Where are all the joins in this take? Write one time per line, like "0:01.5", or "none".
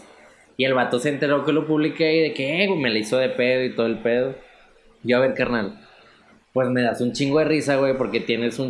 none